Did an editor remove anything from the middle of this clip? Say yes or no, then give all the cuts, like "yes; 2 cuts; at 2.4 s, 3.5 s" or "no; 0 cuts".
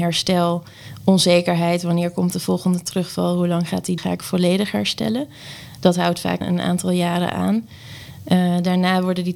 yes; 2 cuts; at 4.0 s, 6.4 s